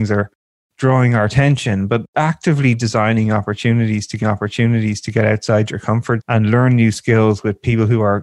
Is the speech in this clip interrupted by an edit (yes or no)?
yes